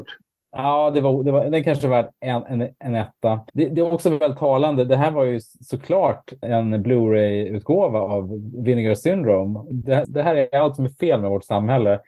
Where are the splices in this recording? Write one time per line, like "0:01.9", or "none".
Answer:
0:03.5
0:06.4
0:09.7
0:10.0